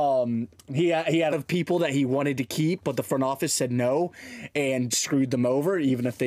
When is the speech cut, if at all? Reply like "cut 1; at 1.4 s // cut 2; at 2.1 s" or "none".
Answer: cut 1; at 1.3 s // cut 2; at 4.9 s